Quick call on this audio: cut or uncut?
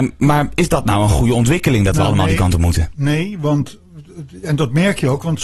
uncut